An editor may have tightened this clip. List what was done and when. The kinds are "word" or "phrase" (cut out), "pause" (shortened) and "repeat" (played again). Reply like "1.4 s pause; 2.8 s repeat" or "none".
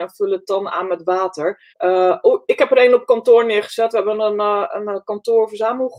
1.7 s pause